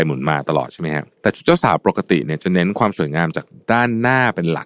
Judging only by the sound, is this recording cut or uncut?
cut